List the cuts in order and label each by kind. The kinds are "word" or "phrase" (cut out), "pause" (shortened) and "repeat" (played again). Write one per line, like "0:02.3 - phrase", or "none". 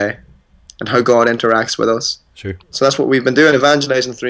0:02.6 - pause